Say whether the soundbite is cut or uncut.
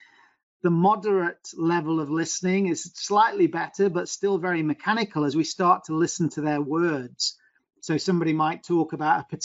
uncut